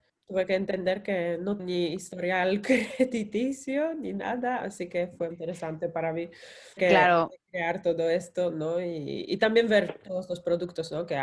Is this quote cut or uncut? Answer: cut